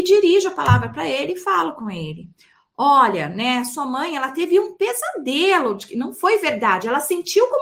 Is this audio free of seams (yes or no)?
yes